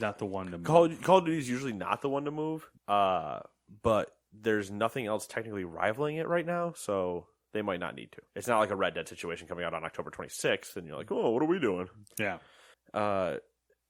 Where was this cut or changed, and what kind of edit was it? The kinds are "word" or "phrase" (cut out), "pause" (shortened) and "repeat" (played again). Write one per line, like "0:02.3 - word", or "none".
0:02.8 - pause
0:08.3 - pause
0:12.7 - pause